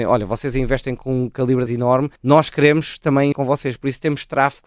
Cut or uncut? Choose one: cut